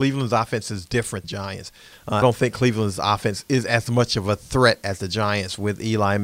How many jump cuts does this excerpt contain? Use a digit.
2